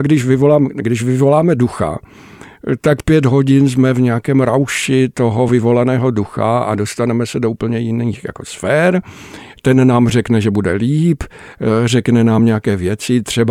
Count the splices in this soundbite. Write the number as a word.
zero